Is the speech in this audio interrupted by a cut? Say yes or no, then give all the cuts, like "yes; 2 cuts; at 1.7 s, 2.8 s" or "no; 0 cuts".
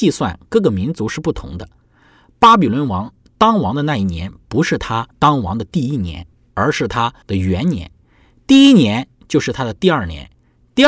yes; 2 cuts; at 5.1 s, 7.2 s